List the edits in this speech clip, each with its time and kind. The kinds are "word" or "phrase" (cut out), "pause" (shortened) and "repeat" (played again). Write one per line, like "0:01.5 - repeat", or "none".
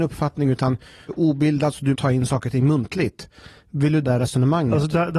0:01.1 - word
0:01.9 - word
0:04.0 - word